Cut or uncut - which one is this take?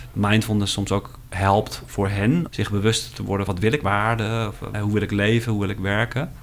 cut